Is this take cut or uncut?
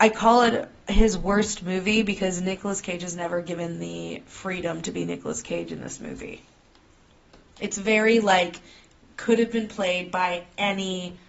uncut